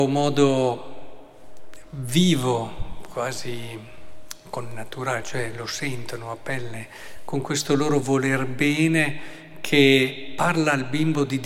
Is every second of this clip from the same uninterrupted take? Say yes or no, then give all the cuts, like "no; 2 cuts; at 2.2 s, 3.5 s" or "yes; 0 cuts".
yes; 0 cuts